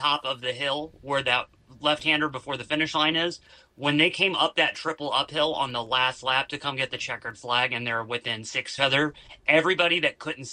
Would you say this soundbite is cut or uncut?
cut